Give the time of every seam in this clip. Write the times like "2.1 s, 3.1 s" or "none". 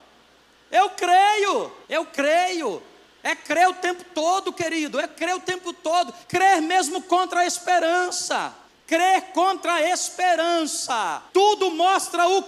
1.8 s, 3.0 s, 6.2 s, 8.7 s, 11.3 s